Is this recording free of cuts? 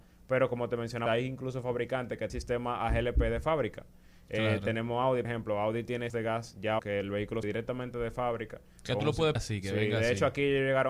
no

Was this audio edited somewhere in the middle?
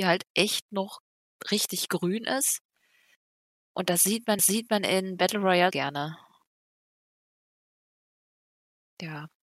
yes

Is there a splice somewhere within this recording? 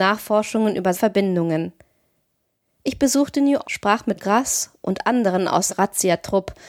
yes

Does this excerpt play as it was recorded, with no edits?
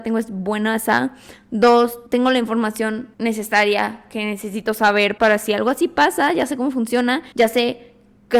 no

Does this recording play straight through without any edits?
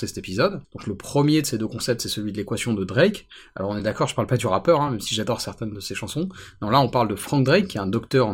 yes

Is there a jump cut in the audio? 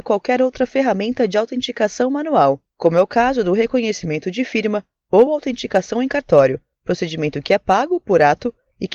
no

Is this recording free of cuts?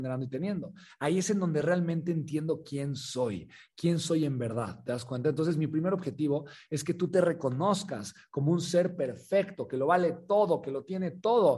yes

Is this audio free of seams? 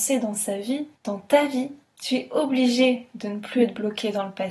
no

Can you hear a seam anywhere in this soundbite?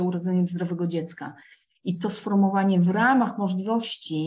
no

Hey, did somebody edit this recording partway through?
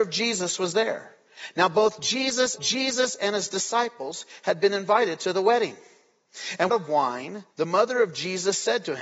yes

